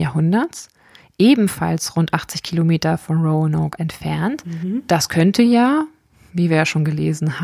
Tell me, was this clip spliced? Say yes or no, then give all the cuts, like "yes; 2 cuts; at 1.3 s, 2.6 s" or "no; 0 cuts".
yes; 1 cut; at 3.8 s